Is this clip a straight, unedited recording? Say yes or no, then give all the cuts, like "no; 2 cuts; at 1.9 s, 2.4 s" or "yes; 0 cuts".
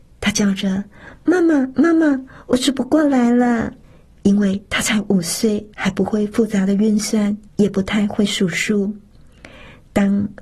no; 3 cuts; at 3.8 s, 5.7 s, 7.5 s